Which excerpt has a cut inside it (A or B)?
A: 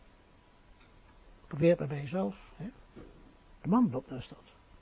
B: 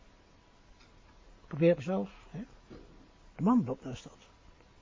B